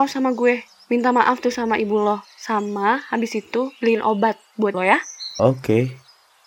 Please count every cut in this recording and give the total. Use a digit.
2